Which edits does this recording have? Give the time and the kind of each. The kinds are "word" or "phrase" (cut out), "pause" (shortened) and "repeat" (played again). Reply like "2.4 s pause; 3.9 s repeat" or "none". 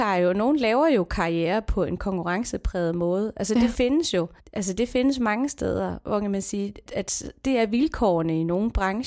4.4 s pause; 6.9 s word